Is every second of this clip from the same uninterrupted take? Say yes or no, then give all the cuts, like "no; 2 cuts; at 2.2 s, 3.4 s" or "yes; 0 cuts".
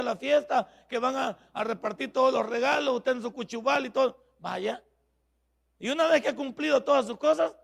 yes; 0 cuts